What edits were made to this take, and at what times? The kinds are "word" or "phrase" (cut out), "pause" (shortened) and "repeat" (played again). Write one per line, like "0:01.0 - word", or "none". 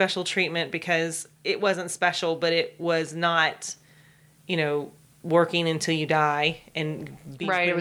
0:01.3 - pause